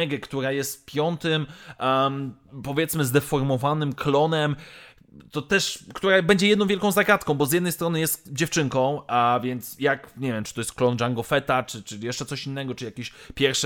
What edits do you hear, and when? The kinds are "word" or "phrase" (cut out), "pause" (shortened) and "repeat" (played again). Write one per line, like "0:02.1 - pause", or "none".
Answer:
none